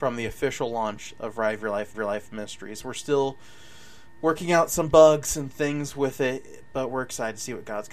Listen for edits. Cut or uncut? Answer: cut